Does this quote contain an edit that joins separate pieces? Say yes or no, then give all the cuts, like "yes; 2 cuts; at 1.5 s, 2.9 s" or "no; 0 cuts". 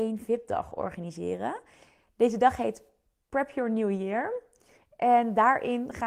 no; 0 cuts